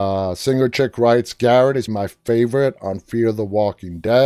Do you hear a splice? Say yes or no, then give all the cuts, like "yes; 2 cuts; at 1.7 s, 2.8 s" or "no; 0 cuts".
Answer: yes; 1 cut; at 1.9 s